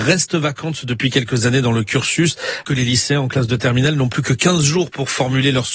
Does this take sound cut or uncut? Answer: cut